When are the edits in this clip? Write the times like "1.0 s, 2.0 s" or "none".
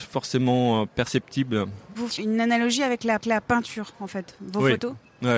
2.1 s, 3.2 s